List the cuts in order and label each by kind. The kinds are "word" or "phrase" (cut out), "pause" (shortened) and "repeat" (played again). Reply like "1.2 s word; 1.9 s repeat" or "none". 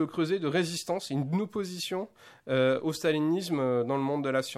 none